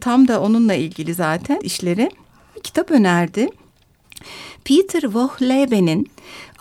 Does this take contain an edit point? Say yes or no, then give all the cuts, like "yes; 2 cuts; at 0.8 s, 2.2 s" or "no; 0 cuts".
yes; 2 cuts; at 1.6 s, 2.5 s